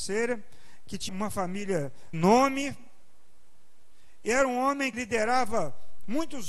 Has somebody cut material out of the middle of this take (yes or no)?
yes